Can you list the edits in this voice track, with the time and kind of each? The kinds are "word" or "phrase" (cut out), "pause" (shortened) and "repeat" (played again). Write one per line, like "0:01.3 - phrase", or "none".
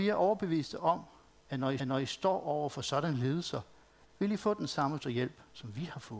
0:01.8 - repeat
0:05.0 - word